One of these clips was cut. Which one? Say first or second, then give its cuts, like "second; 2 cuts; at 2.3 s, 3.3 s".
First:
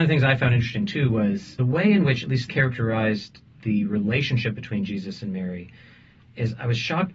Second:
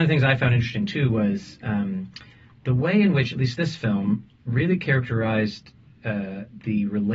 first; 3 cuts; at 1.6 s, 2.5 s, 3.6 s